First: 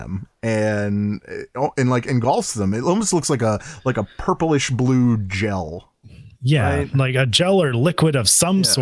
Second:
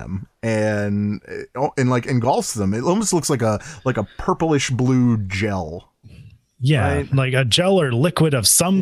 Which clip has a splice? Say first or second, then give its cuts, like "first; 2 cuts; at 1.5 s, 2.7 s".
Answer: first; 1 cut; at 6.3 s